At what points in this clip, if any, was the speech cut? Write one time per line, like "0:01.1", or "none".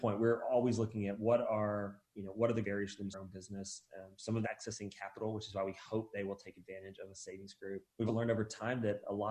0:02.6
0:03.1
0:04.4
0:08.1